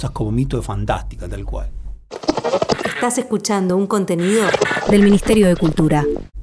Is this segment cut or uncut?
uncut